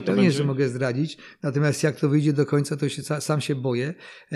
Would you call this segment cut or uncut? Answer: uncut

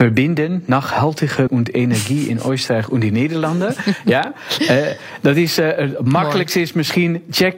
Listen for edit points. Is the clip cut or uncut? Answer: cut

